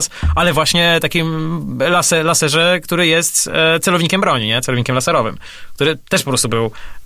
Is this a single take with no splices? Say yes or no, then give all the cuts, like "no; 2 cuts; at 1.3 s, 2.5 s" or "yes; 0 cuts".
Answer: yes; 0 cuts